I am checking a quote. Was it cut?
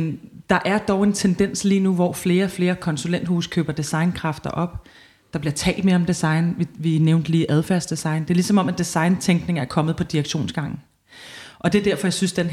no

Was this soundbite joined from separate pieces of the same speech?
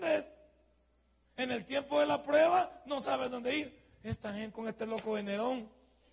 yes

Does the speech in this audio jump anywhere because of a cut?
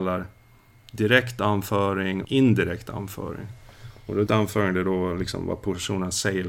yes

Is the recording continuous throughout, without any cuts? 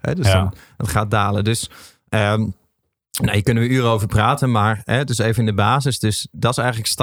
yes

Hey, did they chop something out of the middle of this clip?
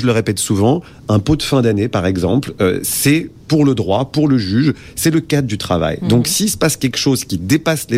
no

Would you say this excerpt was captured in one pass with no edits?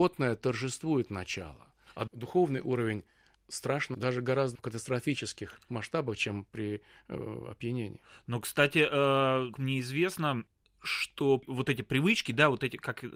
no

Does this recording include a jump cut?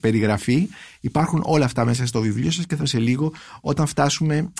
yes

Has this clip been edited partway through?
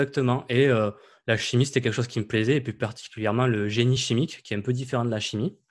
no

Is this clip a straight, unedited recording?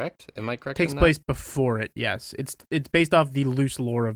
yes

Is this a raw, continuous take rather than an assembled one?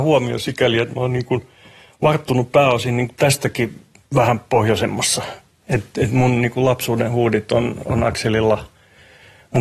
yes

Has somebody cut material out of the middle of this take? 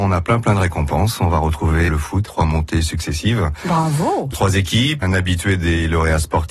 yes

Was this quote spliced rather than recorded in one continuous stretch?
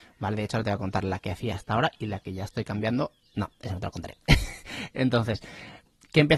no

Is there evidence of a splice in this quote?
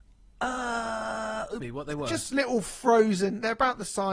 yes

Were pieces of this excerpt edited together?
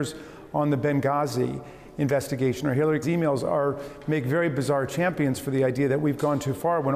yes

